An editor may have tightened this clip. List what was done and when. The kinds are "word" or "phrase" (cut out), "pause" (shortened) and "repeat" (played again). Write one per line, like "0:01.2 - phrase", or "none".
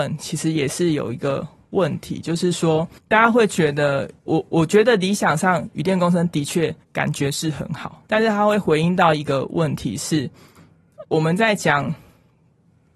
0:03.0 - pause
0:04.2 - pause
0:06.8 - pause
0:08.1 - word
0:11.0 - word